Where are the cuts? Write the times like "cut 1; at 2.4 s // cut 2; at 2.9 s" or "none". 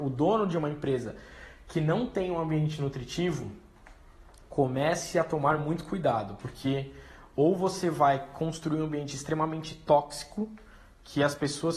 none